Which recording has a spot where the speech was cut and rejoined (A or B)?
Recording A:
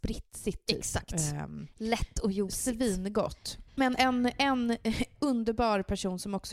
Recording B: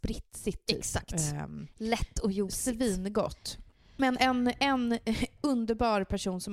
A